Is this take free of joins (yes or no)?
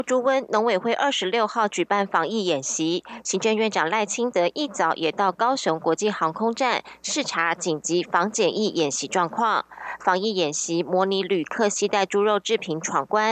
yes